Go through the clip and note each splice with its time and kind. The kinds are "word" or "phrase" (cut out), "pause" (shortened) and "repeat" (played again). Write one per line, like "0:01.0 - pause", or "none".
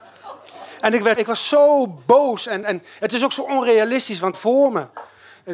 0:01.2 - word
0:02.6 - word
0:04.3 - word